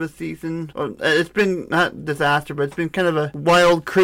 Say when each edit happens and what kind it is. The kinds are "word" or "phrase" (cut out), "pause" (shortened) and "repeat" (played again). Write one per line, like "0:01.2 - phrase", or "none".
none